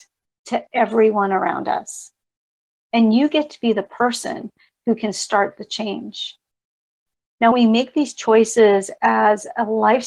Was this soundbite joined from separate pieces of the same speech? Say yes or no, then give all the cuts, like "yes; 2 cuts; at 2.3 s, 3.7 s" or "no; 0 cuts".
yes; 1 cut; at 7.5 s